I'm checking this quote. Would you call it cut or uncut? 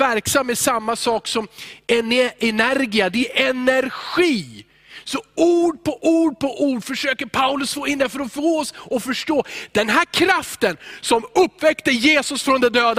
uncut